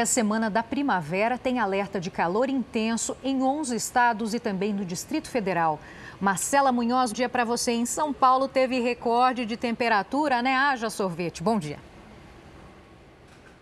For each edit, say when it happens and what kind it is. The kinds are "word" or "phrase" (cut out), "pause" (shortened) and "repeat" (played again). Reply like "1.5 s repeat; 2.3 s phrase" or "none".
7.1 s word